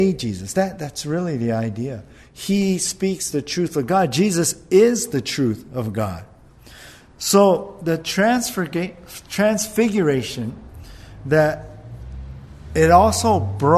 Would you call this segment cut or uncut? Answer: uncut